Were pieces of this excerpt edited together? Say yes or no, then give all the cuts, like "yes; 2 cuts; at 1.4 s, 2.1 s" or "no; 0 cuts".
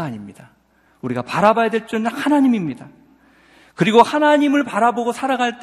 no; 0 cuts